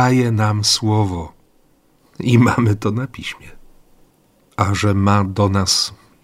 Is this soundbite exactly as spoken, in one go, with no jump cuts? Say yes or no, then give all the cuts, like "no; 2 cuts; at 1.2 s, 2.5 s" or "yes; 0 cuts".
yes; 0 cuts